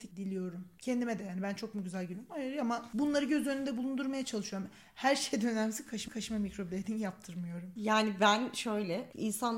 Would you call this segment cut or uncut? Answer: cut